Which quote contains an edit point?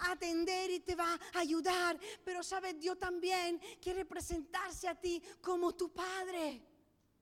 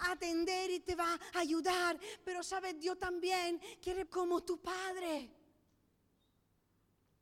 second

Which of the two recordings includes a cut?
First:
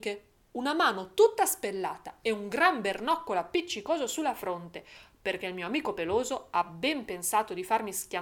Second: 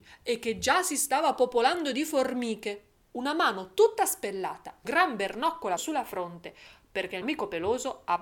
second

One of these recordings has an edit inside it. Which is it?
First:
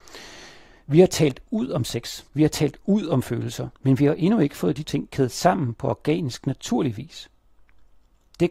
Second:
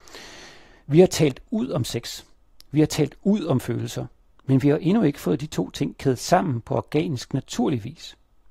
first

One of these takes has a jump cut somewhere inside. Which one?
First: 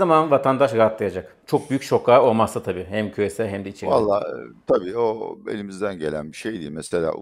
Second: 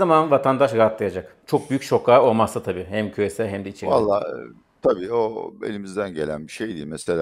first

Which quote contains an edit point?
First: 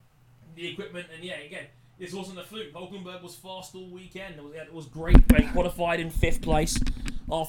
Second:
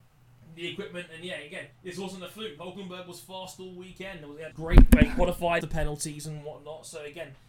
second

